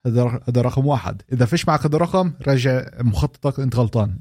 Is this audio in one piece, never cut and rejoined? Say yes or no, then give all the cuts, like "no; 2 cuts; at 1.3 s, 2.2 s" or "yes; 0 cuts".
yes; 0 cuts